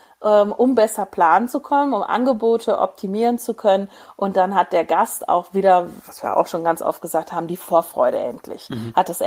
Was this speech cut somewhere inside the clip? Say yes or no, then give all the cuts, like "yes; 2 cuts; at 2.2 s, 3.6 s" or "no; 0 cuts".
no; 0 cuts